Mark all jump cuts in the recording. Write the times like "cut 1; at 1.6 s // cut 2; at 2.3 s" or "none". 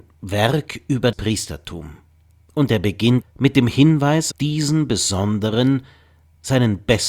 cut 1; at 1.1 s // cut 2; at 3.2 s // cut 3; at 4.3 s